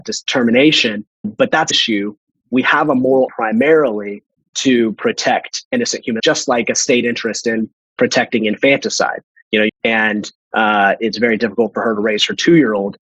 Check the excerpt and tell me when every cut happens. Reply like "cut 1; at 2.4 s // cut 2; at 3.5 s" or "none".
cut 1; at 1.2 s // cut 2; at 1.7 s // cut 3; at 3.3 s // cut 4; at 6.2 s // cut 5; at 9.7 s